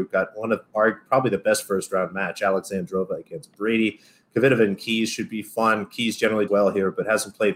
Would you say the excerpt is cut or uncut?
cut